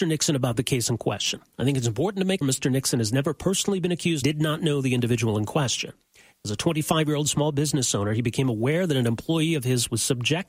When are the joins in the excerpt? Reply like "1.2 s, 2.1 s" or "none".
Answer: 2.4 s, 4.2 s